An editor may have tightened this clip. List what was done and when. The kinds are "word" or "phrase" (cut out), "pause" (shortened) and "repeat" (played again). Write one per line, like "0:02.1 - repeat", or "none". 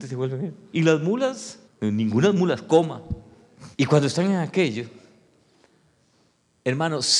0:01.7 - pause
0:03.7 - pause

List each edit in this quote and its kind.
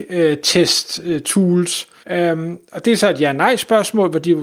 0:02.0 - pause

